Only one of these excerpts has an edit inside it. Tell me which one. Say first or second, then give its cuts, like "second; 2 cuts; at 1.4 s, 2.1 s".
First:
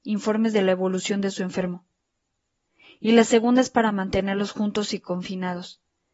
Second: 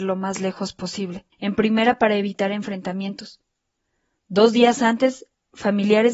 second; 1 cut; at 1.3 s